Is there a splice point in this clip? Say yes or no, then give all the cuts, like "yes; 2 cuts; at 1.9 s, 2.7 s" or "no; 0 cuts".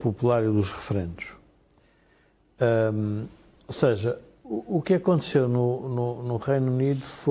no; 0 cuts